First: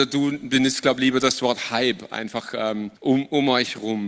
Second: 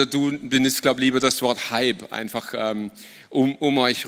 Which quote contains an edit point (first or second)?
first